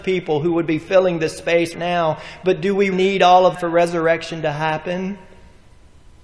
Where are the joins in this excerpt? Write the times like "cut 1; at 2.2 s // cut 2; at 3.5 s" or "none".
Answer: cut 1; at 1.7 s // cut 2; at 2.9 s // cut 3; at 3.5 s